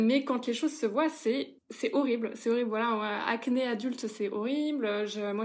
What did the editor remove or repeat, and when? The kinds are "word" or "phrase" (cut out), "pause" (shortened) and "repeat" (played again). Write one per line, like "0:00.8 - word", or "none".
0:01.6 - pause

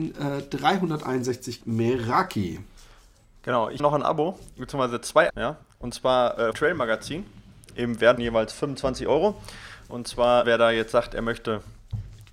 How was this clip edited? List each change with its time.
0:01.6 - word
0:03.8 - word
0:05.3 - word
0:06.5 - word
0:08.2 - word
0:10.4 - word

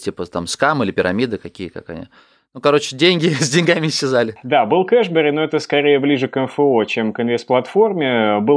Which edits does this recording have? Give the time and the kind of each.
none

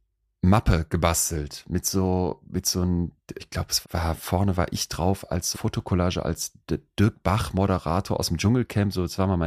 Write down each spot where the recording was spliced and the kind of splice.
0:03.4 - word
0:03.8 - word
0:05.5 - word

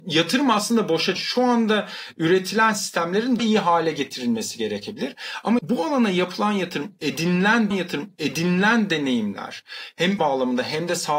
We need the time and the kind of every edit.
0:01.2 - phrase
0:03.4 - word
0:05.6 - word
0:07.7 - repeat
0:10.2 - word

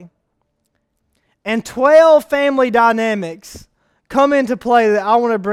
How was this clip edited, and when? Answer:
none

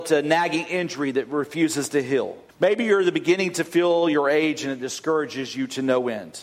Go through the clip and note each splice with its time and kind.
0:02.5 - pause

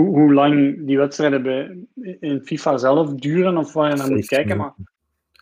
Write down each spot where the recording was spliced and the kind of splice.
none

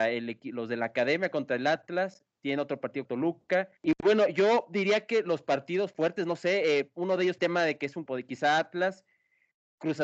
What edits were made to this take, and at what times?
0:03.0 - word
0:03.8 - pause
0:07.4 - phrase
0:08.1 - word

